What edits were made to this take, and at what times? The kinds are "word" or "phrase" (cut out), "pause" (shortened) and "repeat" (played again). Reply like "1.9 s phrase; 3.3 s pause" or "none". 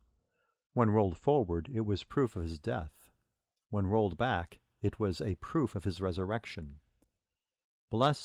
none